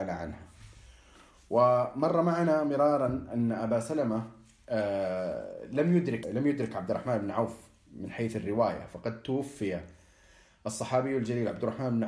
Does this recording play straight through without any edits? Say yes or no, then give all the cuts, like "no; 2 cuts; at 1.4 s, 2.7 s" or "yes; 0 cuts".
no; 1 cut; at 6.2 s